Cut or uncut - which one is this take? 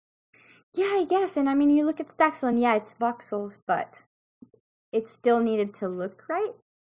uncut